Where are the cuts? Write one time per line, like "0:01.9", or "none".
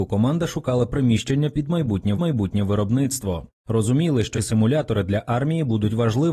0:02.1
0:04.3